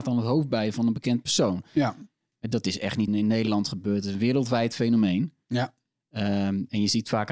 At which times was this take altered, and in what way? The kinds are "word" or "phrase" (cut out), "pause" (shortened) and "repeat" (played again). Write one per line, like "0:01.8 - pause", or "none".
0:03.1 - word